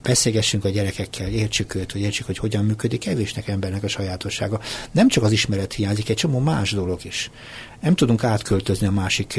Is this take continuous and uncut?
yes; 0 cuts

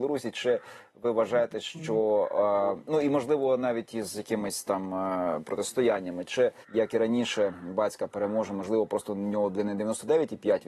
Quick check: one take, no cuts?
no; 1 cut; at 6.6 s

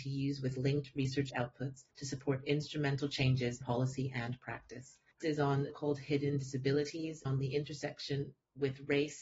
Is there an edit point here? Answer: yes; 5 cuts; at 1.9 s, 3.6 s, 5.2 s, 5.7 s, 7.3 s

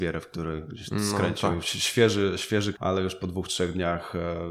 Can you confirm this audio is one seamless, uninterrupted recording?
no; 1 cut; at 2.8 s

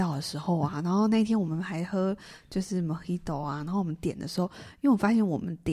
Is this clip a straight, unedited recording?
yes; 0 cuts

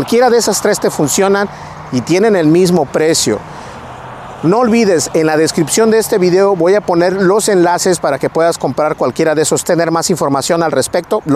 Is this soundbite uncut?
no; 1 cut; at 9.6 s

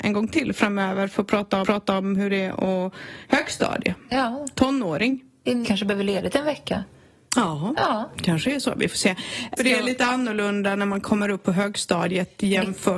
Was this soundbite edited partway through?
yes; 3 cuts; at 1.6 s, 5.6 s, 9.6 s

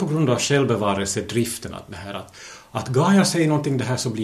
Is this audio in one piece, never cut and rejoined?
yes; 0 cuts

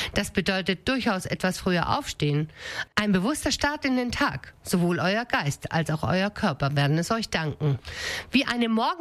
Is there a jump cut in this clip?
no; 0 cuts

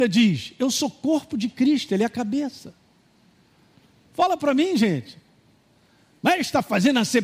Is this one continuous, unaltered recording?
yes; 0 cuts

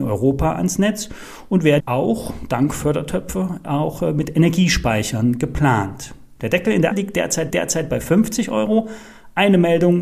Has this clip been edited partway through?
yes; 3 cuts; at 1.8 s, 6.9 s, 7.5 s

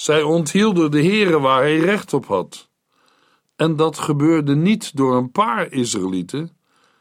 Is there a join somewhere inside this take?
no; 0 cuts

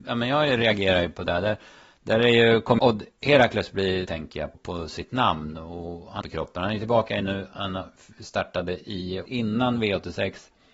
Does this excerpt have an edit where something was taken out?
yes; 6 cuts; at 2.8 s, 4.1 s, 4.5 s, 6.2 s, 7.2 s, 9.3 s

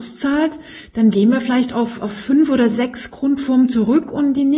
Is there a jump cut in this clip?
no; 0 cuts

